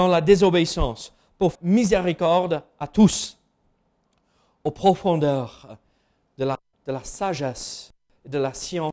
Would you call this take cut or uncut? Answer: cut